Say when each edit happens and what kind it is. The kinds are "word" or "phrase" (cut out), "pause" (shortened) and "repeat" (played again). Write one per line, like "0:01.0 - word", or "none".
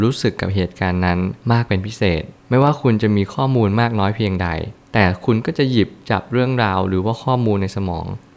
0:01.4 - pause